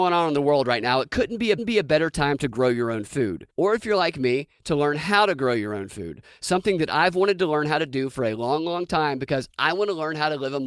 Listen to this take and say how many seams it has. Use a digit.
2